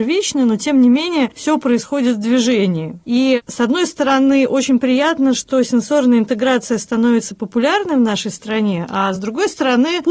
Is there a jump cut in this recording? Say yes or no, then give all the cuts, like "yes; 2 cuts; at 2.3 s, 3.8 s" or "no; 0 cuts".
no; 0 cuts